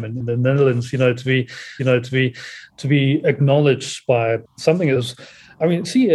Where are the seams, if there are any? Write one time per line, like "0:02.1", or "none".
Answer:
0:01.8